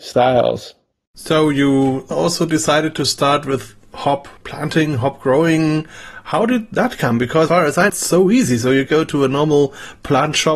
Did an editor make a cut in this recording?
yes; 5 cuts; at 2.1 s, 4.4 s, 7.5 s, 7.9 s, 8.9 s

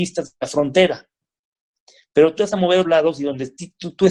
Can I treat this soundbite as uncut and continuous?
no; 2 cuts; at 2.4 s, 2.8 s

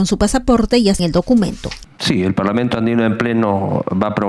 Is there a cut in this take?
yes; 1 cut; at 1.0 s

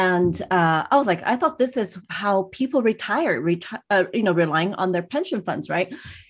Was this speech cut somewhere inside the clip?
no; 0 cuts

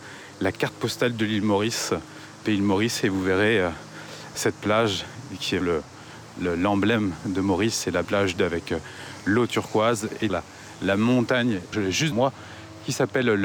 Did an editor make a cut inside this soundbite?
yes; 8 cuts; at 2.4 s, 4.3 s, 5.6 s, 8.0 s, 8.4 s, 10.3 s, 11.7 s, 12.1 s

